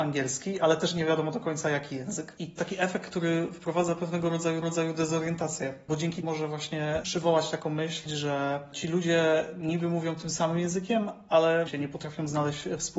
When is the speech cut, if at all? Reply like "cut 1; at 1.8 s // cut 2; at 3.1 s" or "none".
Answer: cut 1; at 2.6 s // cut 2; at 4.6 s // cut 3; at 6.2 s // cut 4; at 11.7 s